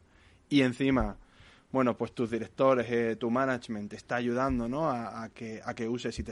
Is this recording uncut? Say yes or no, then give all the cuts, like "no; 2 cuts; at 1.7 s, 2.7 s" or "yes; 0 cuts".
yes; 0 cuts